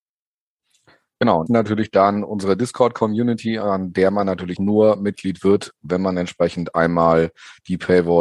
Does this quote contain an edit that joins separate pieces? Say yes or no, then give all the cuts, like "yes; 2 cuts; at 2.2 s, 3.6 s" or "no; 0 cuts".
yes; 2 cuts; at 1.5 s, 4.6 s